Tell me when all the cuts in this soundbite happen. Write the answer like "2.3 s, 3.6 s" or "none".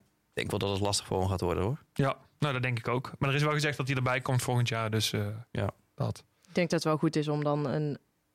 1.9 s, 5.5 s